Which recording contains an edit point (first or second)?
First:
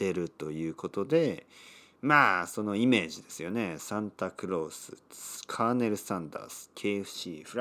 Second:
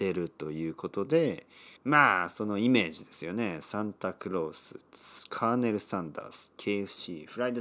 second